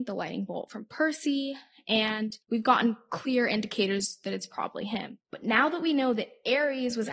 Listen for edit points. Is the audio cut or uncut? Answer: cut